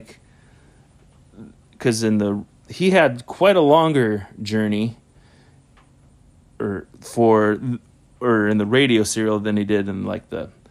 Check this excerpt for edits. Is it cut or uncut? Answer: uncut